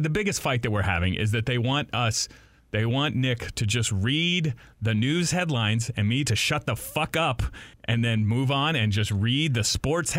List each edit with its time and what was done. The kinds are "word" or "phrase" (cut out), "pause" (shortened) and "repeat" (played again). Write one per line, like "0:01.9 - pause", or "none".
0:07.7 - pause